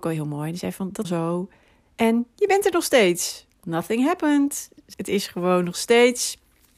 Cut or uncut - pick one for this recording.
cut